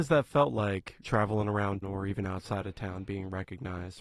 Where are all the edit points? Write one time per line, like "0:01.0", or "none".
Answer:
0:01.0
0:01.8